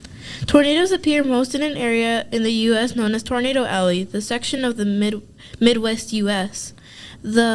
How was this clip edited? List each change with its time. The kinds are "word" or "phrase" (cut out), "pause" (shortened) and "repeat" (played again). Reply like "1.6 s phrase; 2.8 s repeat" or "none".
none